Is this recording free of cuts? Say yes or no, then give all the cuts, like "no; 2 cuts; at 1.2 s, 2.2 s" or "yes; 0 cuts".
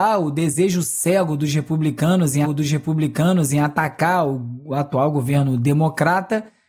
no; 1 cut; at 2.4 s